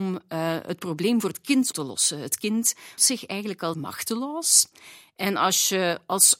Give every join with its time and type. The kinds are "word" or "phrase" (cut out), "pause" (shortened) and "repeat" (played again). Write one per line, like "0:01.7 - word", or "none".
0:01.7 - word
0:03.0 - word
0:03.7 - word